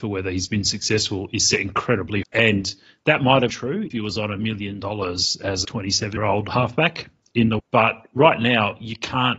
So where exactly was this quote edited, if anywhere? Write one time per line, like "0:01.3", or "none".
0:02.2
0:03.5
0:03.9
0:05.6
0:06.2
0:07.6